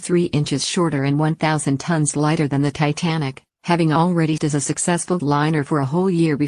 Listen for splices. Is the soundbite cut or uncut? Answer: cut